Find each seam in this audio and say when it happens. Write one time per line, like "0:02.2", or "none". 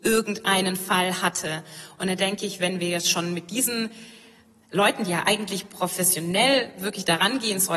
none